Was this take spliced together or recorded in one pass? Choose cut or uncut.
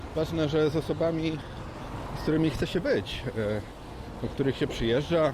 uncut